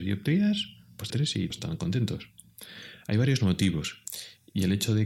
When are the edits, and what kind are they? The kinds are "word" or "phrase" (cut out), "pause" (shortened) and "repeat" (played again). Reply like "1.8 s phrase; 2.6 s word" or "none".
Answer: 1.1 s phrase; 1.5 s word